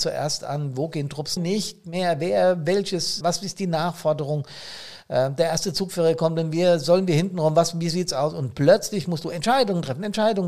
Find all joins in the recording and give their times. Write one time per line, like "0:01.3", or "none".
0:01.4
0:03.2